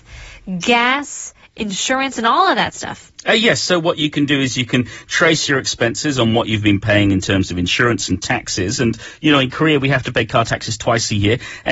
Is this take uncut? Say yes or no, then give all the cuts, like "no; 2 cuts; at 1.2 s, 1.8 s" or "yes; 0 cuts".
yes; 0 cuts